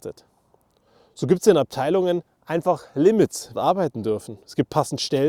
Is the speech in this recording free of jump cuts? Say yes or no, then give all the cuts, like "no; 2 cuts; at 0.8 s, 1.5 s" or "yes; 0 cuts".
no; 2 cuts; at 2.3 s, 3.5 s